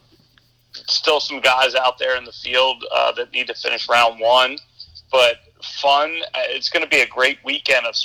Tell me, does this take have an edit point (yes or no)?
no